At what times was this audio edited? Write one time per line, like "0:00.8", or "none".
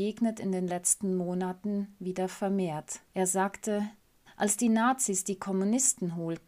0:03.1
0:04.3